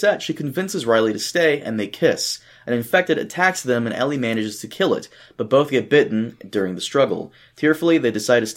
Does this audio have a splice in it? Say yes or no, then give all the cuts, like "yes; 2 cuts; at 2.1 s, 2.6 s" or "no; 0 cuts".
no; 0 cuts